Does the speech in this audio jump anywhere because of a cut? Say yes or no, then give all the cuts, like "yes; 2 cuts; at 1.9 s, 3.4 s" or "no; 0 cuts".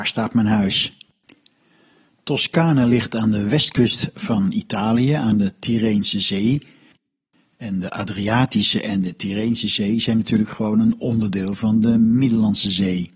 no; 0 cuts